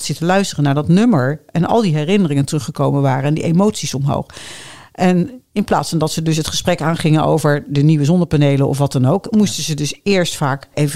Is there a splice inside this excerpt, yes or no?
no